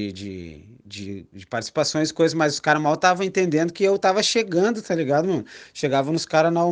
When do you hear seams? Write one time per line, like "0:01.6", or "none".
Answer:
none